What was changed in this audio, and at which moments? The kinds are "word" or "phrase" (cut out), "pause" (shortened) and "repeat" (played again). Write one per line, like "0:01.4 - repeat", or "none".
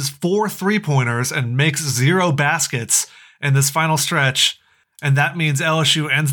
none